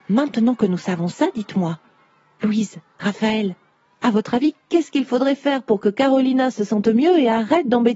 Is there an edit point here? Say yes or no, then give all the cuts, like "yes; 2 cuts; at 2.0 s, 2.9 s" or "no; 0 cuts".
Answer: no; 0 cuts